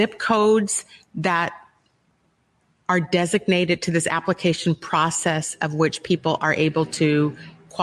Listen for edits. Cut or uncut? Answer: uncut